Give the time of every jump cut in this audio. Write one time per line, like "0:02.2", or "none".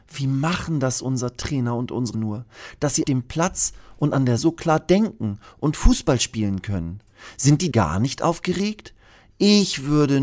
0:02.1
0:03.0
0:04.4
0:07.7